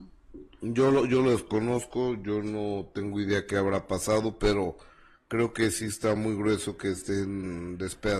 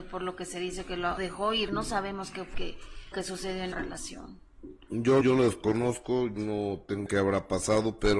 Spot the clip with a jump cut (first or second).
second